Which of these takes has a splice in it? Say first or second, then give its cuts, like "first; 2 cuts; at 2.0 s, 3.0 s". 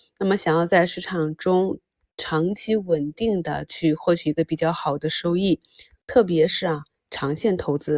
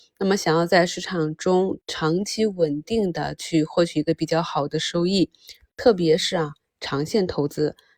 second; 1 cut; at 1.8 s